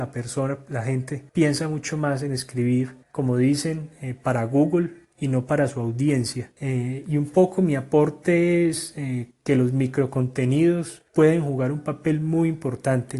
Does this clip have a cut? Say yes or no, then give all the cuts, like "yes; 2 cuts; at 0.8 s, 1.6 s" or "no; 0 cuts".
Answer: yes; 4 cuts; at 1.3 s, 3.0 s, 6.6 s, 11.1 s